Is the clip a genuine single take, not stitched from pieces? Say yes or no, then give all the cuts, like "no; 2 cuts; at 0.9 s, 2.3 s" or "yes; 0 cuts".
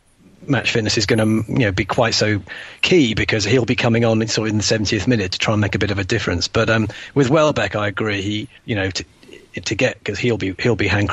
no; 1 cut; at 8.6 s